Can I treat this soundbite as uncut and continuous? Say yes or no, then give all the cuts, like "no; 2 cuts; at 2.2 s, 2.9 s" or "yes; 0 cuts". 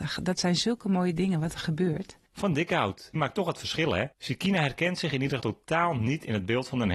no; 3 cuts; at 3.2 s, 4.1 s, 5.4 s